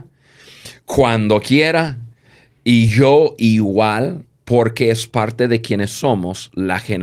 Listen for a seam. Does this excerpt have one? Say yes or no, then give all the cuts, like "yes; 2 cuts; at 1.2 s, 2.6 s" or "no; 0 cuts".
no; 0 cuts